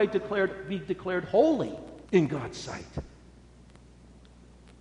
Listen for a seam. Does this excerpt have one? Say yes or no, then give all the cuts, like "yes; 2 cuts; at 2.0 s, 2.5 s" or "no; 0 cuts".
yes; 1 cut; at 2.1 s